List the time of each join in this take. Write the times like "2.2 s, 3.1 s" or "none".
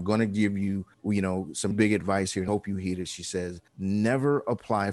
0.9 s, 1.7 s, 2.5 s, 3.7 s